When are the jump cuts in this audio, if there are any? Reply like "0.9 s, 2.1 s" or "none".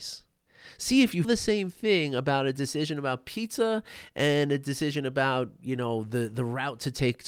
1.2 s